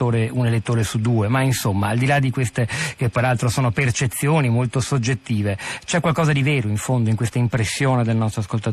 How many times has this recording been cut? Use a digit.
0